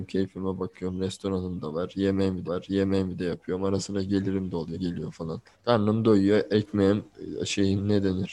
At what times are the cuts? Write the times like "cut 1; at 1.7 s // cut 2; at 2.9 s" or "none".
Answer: cut 1; at 2.4 s // cut 2; at 4.7 s // cut 3; at 5.5 s